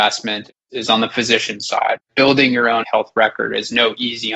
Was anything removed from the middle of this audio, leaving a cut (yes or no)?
yes